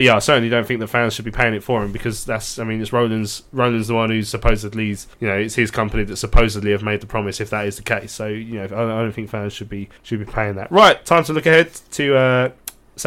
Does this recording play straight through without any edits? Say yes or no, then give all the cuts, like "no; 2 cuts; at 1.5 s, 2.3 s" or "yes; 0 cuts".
no; 2 cuts; at 5.1 s, 10.0 s